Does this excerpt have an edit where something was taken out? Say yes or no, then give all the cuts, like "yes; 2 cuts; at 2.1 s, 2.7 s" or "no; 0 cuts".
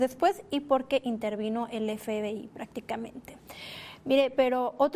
no; 0 cuts